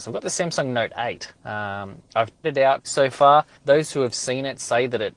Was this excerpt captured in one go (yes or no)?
no